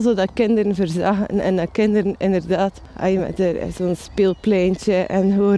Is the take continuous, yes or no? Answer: yes